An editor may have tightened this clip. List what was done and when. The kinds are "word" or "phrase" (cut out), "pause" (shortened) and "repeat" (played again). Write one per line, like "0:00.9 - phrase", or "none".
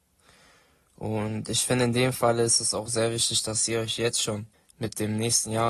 0:04.5 - pause